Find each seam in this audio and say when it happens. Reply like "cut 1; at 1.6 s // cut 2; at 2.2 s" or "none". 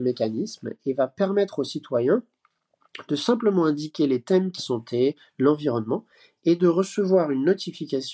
cut 1; at 4.6 s